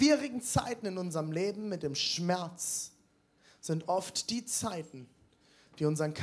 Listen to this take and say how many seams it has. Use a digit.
0